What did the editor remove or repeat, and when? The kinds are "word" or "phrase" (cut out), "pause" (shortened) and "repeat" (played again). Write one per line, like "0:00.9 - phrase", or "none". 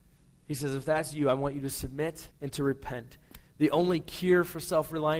0:02.3 - pause